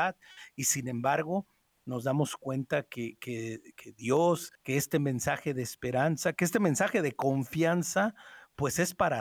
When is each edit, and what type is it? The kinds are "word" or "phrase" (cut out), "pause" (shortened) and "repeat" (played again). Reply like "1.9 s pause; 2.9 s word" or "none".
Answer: 4.5 s pause